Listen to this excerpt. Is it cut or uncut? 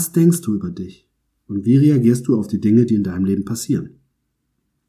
uncut